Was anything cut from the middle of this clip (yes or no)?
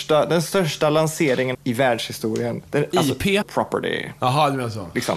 yes